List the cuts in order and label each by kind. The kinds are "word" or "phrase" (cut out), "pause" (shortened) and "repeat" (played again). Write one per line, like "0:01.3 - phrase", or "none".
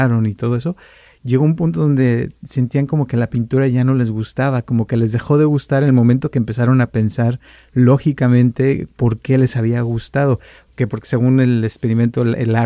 none